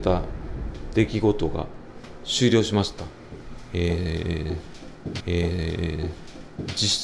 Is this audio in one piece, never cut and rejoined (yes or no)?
no